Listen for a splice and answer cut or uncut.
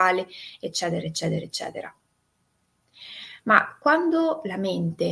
uncut